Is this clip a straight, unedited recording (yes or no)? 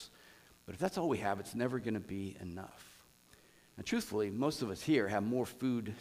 yes